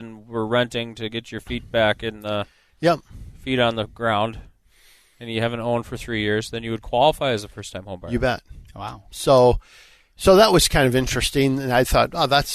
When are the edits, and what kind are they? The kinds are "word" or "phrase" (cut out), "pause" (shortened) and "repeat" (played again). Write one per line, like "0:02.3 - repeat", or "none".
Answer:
none